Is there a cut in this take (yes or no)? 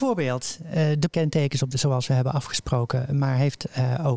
yes